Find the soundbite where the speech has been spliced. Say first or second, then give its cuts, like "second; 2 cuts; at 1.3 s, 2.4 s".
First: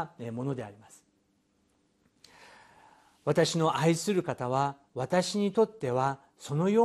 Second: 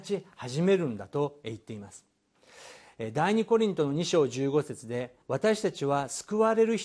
second; 1 cut; at 5.2 s